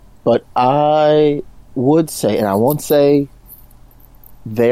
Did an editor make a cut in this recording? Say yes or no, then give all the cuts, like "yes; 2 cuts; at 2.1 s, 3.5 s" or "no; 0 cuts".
yes; 1 cut; at 1.6 s